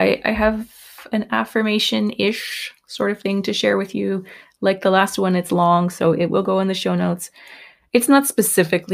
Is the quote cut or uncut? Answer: uncut